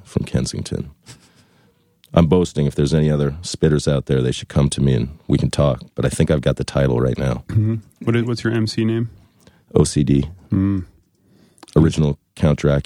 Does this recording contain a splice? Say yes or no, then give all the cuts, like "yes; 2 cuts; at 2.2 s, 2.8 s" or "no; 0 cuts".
no; 0 cuts